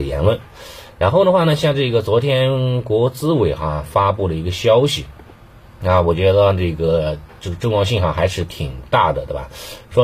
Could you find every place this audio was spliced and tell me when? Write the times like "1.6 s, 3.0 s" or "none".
none